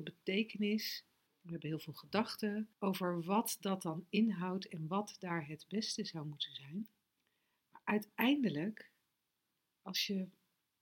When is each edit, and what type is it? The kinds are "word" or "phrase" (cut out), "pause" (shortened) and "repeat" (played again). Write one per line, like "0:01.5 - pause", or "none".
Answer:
0:01.3 - pause
0:02.7 - pause
0:07.2 - pause